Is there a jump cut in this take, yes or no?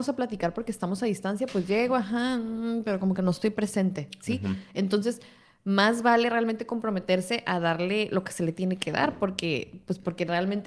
no